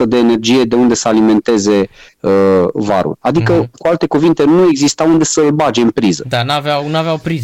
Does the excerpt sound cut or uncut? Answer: uncut